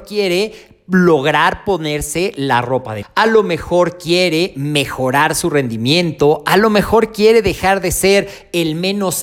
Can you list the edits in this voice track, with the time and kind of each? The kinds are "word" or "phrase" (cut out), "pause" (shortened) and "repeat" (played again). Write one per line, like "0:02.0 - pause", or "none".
0:03.0 - word